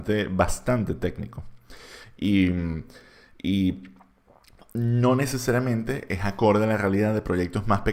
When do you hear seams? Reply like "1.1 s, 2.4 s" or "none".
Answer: none

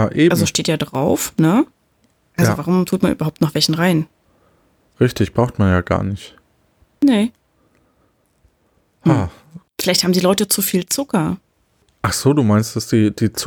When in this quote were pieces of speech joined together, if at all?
none

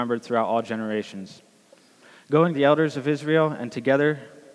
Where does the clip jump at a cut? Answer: 2.5 s

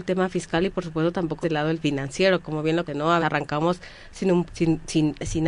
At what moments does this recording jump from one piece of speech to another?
1.4 s, 1.8 s, 2.9 s, 3.2 s, 4.5 s

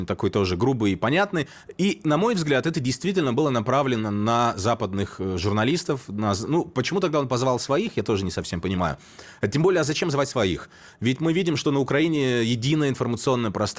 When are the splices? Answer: none

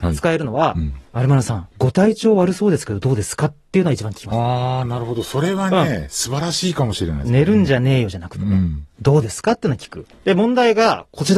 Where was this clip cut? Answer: 1.0 s, 1.7 s, 10.1 s

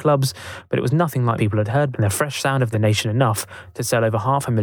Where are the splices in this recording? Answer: 1.4 s, 1.9 s, 2.7 s

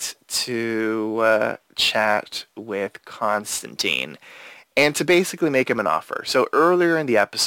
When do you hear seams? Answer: none

